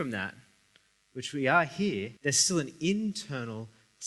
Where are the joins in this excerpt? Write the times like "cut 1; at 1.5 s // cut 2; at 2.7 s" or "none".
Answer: cut 1; at 2.2 s